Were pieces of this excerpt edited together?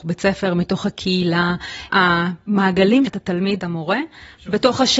yes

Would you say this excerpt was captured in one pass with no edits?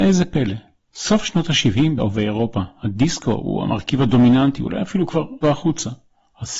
no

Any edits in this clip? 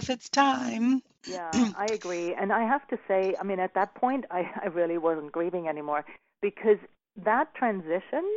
no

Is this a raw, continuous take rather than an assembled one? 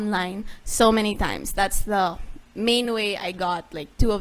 yes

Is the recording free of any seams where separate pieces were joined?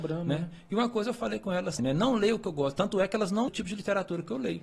no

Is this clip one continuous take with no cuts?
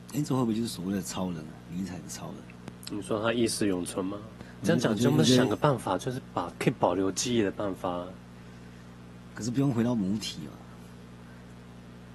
no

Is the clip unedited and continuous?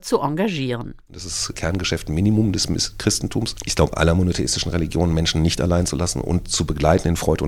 yes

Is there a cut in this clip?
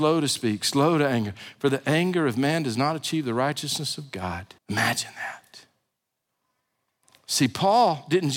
yes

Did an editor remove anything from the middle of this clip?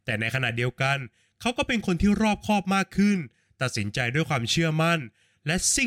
no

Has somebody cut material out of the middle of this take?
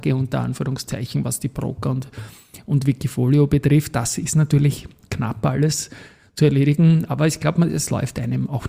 no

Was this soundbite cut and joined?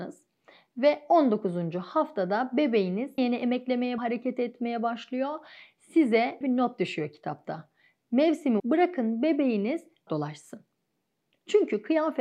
yes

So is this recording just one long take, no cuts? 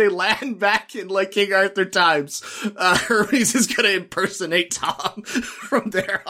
yes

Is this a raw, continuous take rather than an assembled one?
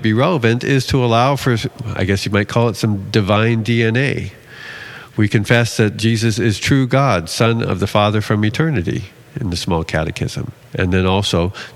yes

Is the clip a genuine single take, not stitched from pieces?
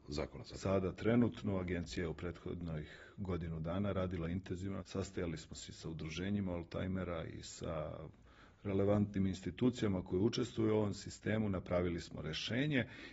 no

